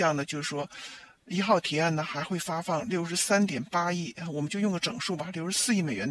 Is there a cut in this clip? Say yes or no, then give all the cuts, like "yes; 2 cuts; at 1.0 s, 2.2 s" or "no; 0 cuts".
no; 0 cuts